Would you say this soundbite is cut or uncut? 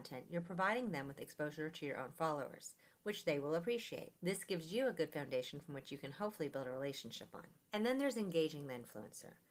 uncut